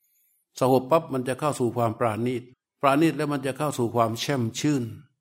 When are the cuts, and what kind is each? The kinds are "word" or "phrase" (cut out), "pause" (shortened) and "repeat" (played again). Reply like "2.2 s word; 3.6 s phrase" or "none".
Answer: 2.5 s pause